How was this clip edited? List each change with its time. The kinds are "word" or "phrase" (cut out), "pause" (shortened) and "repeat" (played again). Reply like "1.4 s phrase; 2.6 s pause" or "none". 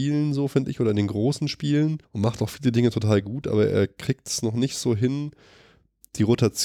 2.0 s pause